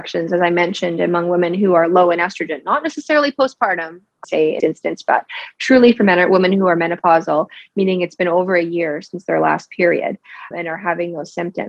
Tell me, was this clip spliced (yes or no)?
yes